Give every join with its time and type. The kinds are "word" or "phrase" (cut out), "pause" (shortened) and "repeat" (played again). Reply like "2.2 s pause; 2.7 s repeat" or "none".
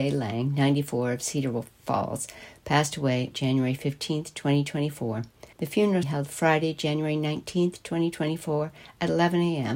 3.3 s word; 5.5 s pause; 6.0 s phrase